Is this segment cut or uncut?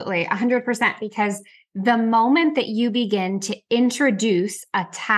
uncut